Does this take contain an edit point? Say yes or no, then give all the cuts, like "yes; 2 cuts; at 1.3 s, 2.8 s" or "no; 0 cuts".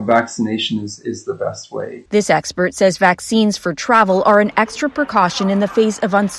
yes; 1 cut; at 2.1 s